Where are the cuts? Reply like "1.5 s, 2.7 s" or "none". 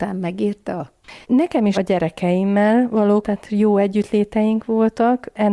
1.2 s, 1.7 s, 3.2 s